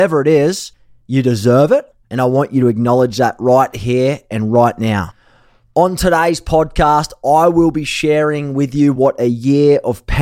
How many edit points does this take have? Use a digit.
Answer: 0